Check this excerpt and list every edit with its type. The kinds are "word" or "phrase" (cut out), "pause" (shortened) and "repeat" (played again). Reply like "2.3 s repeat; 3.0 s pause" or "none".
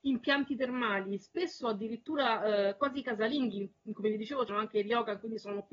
4.5 s word

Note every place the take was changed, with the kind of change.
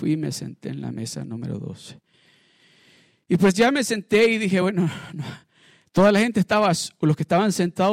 none

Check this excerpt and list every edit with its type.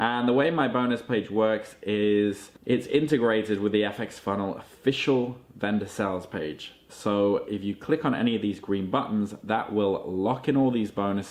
none

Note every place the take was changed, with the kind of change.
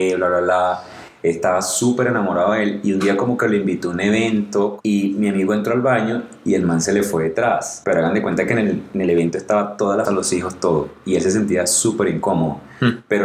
10.1 s phrase

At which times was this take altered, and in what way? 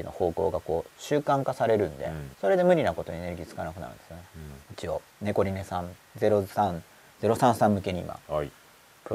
2.3 s pause; 4.6 s pause; 5.1 s pause; 6.0 s pause

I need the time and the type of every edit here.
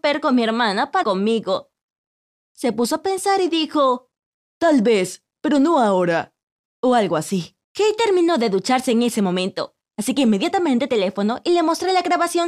1.0 s word; 4.3 s pause; 7.6 s pause; 10.9 s phrase

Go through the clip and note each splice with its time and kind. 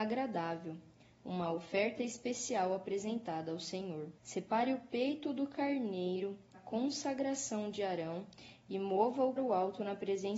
4.2 s pause; 6.5 s word; 9.4 s word

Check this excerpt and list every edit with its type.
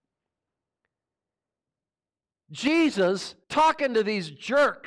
3.4 s pause

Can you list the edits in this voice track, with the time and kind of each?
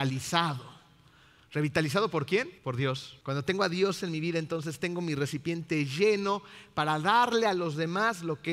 2.6 s pause; 3.2 s pause

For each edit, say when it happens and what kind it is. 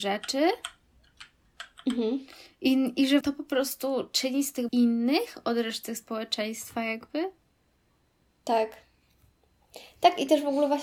3.2 s word; 4.7 s word

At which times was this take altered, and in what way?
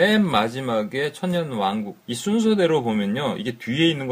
2.0 s pause

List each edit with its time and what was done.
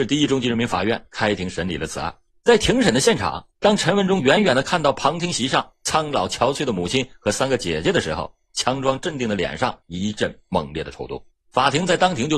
2.3 s pause; 3.5 s pause; 9.8 s pause; 11.3 s pause

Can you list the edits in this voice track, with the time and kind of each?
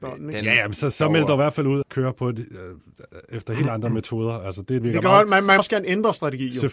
0.9 s word; 1.8 s phrase; 4.8 s phrase; 5.6 s word

